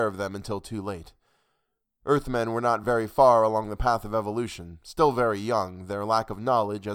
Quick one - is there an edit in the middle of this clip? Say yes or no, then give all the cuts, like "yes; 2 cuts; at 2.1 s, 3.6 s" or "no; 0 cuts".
no; 0 cuts